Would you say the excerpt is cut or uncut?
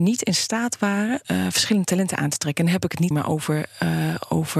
cut